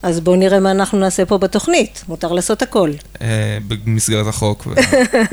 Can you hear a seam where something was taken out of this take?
no; 0 cuts

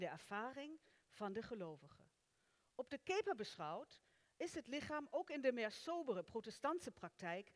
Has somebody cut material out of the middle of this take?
no; 0 cuts

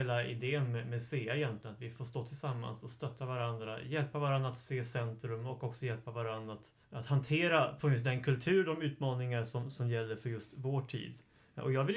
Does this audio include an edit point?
yes; 1 cut; at 6.8 s

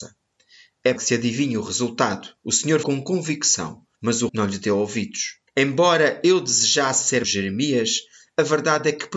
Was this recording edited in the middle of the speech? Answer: yes; 7 cuts; at 1.0 s, 2.4 s, 2.8 s, 3.9 s, 4.3 s, 5.5 s, 7.2 s

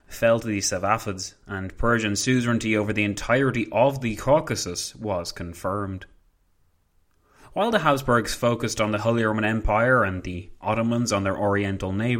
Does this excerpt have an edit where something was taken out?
no; 0 cuts

